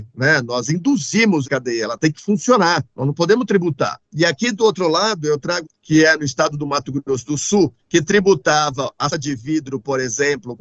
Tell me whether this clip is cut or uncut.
cut